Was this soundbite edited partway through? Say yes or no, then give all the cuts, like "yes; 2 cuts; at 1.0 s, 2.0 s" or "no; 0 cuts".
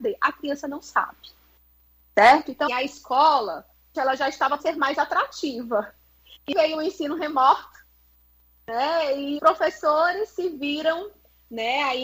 yes; 5 cuts; at 2.7 s, 3.9 s, 4.6 s, 6.5 s, 9.4 s